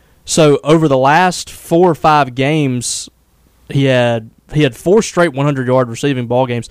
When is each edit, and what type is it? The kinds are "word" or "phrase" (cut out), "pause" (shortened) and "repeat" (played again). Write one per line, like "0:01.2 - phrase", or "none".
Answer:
none